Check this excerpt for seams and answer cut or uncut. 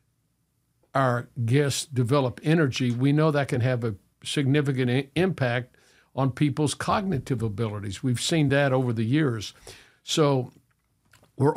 uncut